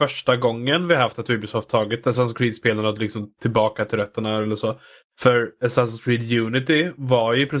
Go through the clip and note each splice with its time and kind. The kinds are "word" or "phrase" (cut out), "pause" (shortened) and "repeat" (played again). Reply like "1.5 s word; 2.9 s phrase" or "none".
none